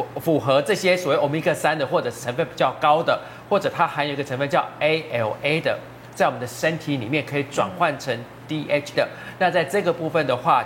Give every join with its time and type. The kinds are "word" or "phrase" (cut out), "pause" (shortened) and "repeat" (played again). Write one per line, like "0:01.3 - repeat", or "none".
0:08.9 - word